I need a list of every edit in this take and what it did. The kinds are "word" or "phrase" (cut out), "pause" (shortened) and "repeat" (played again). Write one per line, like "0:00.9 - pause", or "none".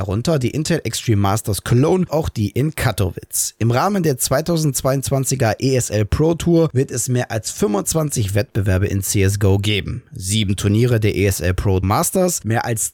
0:02.1 - word
0:11.8 - word